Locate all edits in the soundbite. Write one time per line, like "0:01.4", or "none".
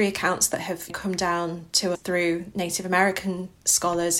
0:01.9